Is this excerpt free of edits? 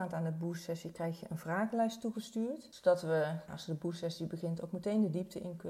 yes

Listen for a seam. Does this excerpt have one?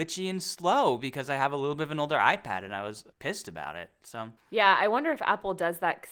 yes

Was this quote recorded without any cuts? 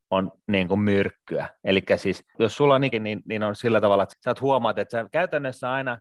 no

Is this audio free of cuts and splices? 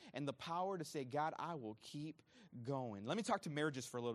yes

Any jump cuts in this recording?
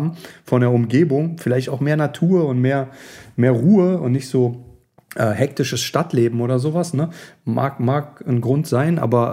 no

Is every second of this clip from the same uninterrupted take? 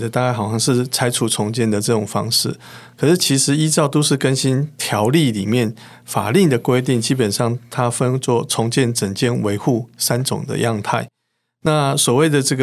yes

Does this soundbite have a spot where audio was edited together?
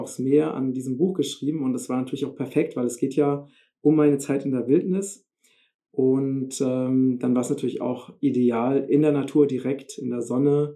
no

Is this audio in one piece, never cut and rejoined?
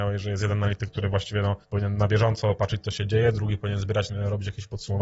no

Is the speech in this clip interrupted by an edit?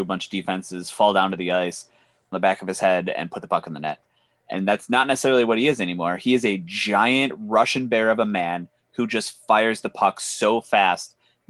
yes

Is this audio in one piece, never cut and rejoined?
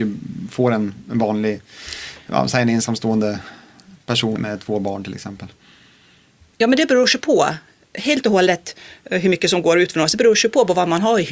no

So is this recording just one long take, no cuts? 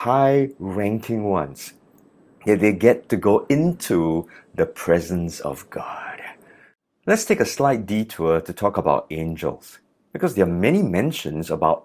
yes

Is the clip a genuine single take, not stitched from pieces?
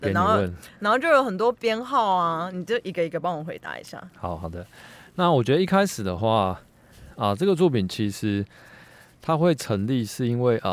yes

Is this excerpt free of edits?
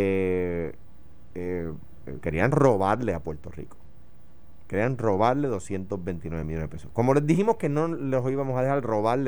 yes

